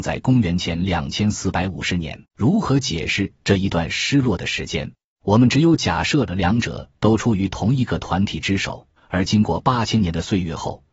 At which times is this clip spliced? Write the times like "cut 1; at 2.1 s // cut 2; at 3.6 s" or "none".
cut 1; at 2.2 s // cut 2; at 5.1 s // cut 3; at 9.0 s